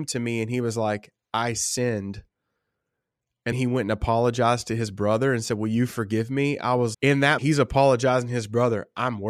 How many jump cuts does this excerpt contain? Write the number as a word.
three